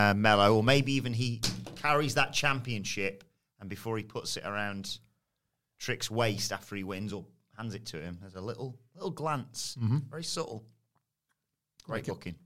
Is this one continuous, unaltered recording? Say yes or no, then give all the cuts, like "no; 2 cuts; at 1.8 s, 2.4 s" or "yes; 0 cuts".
yes; 0 cuts